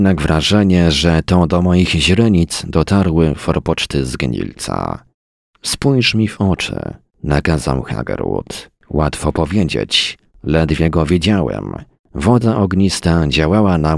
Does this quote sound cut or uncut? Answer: uncut